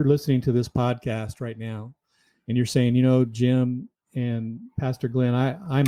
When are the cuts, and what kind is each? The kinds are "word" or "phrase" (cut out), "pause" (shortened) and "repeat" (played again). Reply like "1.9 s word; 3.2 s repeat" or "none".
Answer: none